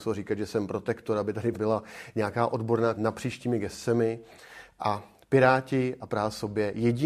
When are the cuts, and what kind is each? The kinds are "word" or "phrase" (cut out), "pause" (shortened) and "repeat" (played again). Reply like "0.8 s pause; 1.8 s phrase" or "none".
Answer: 1.5 s word; 2.9 s word